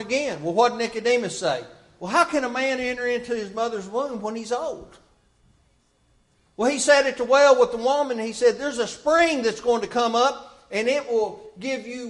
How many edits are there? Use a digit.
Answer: 0